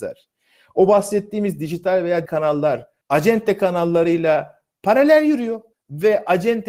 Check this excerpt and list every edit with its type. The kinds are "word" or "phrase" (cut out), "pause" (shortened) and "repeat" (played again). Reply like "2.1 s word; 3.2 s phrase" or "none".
2.3 s word; 3.0 s pause; 5.7 s pause